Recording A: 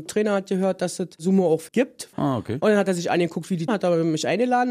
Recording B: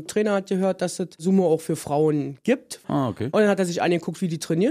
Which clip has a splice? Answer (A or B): A